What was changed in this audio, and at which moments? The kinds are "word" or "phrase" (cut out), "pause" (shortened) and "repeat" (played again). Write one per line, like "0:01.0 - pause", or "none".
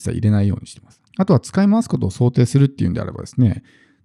0:01.1 - pause